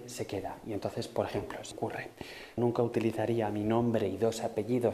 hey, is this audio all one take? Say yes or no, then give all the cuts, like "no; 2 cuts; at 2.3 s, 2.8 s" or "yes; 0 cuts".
no; 2 cuts; at 1.7 s, 2.6 s